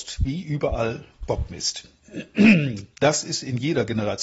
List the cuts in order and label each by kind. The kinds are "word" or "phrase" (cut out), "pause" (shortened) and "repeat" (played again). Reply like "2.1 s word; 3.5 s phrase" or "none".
2.9 s pause